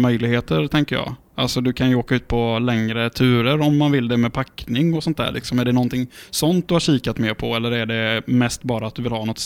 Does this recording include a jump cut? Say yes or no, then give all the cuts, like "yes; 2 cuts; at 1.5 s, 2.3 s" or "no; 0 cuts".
no; 0 cuts